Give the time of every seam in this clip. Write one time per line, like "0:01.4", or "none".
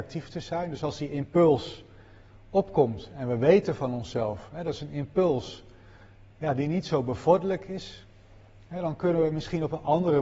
none